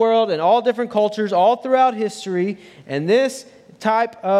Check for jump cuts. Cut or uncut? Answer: uncut